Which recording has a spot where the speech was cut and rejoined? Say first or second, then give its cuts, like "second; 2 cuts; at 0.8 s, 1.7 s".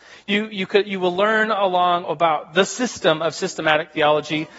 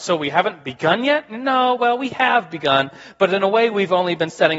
first; 1 cut; at 2.0 s